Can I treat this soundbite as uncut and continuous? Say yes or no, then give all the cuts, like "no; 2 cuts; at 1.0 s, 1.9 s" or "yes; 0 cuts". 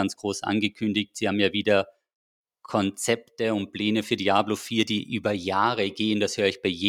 yes; 0 cuts